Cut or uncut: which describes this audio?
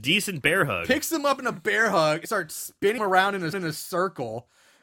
cut